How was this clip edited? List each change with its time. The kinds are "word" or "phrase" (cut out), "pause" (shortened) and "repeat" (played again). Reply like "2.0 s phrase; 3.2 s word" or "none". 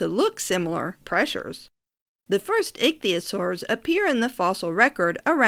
1.0 s phrase